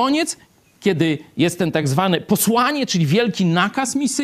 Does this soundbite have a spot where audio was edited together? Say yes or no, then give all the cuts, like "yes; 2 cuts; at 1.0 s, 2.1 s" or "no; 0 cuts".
no; 0 cuts